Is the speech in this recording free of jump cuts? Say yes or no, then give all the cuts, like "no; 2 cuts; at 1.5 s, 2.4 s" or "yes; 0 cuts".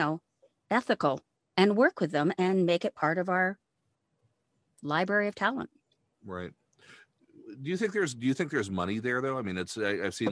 yes; 0 cuts